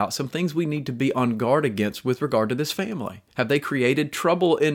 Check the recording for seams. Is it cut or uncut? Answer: cut